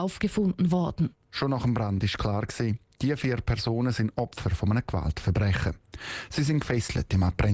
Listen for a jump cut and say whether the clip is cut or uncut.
uncut